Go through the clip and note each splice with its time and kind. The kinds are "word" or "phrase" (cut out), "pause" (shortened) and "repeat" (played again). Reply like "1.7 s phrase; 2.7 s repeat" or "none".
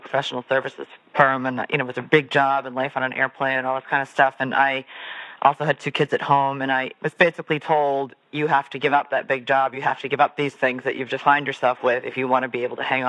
none